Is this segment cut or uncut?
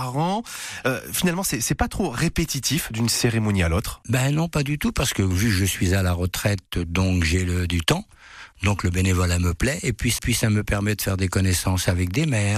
cut